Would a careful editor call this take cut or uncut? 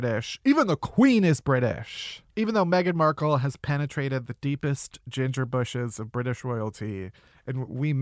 cut